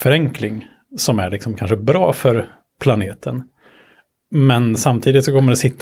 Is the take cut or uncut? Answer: uncut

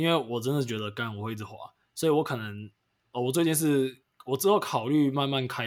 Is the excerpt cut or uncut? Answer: uncut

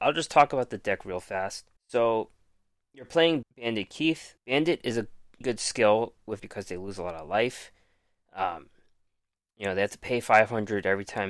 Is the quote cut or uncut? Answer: cut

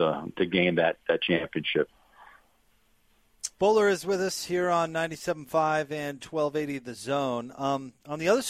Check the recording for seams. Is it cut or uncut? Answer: cut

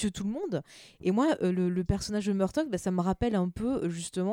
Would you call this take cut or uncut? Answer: uncut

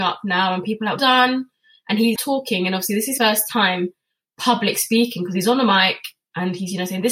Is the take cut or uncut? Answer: cut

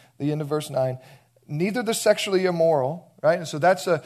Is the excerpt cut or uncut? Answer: uncut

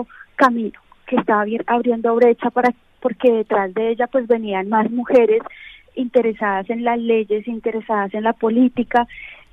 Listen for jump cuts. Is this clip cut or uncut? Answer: uncut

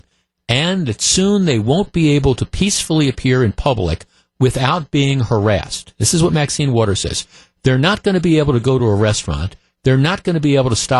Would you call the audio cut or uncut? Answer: uncut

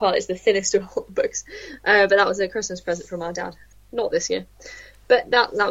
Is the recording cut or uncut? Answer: uncut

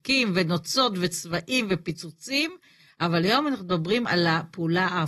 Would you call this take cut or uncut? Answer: uncut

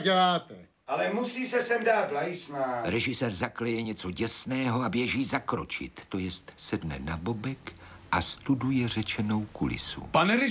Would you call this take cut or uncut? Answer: uncut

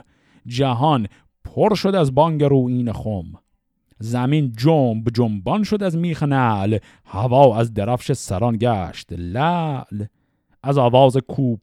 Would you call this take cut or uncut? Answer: uncut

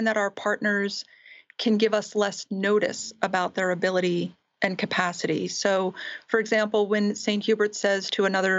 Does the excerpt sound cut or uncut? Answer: uncut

